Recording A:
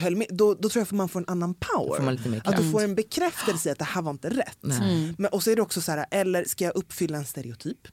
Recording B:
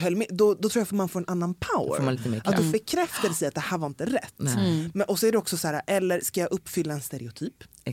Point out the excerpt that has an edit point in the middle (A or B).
B